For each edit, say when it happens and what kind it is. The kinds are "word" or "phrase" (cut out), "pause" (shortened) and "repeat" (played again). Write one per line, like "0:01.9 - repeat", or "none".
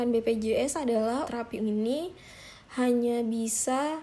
0:01.2 - word
0:01.6 - word